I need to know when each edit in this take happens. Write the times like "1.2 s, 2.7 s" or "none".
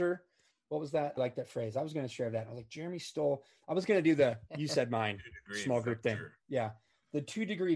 1.2 s, 4.5 s